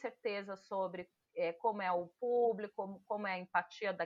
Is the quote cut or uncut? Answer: uncut